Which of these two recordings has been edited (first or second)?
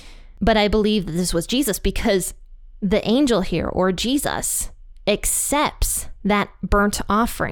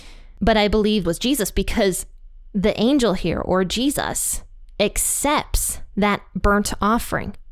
second